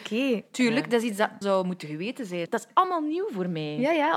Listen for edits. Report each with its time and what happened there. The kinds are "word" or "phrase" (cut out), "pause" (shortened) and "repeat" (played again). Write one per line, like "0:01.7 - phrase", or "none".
0:01.4 - word